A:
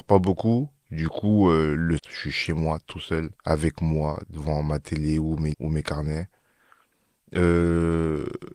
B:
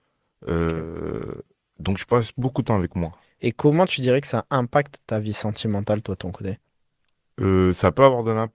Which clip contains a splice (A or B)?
A